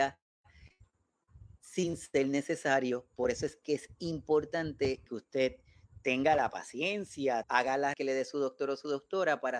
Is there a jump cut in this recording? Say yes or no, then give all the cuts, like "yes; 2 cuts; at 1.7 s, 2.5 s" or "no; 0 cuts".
yes; 3 cuts; at 5.1 s, 7.4 s, 7.9 s